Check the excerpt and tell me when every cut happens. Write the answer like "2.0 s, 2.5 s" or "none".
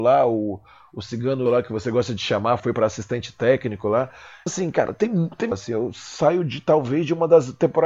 1.5 s, 2.6 s, 4.5 s, 5.5 s